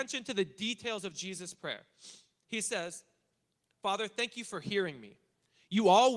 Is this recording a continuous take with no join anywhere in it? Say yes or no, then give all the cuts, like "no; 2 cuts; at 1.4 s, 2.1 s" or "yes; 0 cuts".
yes; 0 cuts